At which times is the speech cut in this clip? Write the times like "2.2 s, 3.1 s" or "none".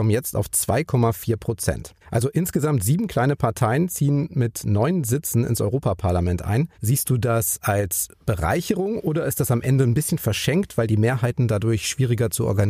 2.0 s, 6.7 s